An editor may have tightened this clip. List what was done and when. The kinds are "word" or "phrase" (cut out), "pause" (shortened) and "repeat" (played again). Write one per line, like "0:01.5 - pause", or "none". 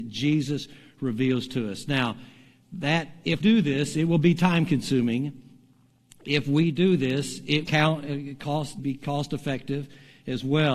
0:03.4 - word
0:07.7 - word
0:08.8 - word

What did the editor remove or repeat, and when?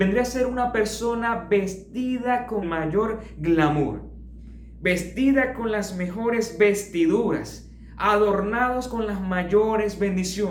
0:02.6 - word

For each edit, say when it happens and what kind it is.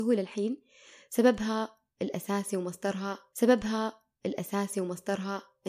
0:03.3 - repeat

